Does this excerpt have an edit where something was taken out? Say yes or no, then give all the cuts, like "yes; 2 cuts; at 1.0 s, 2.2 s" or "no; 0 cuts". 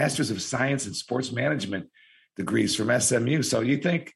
no; 0 cuts